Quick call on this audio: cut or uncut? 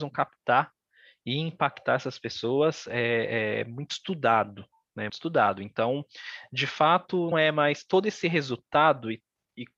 cut